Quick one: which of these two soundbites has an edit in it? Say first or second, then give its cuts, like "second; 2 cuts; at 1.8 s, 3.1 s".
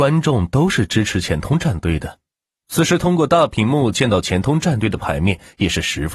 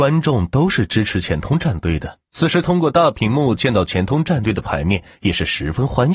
second; 1 cut; at 2.2 s